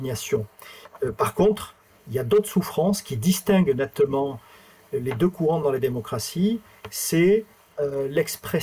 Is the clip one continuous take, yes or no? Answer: yes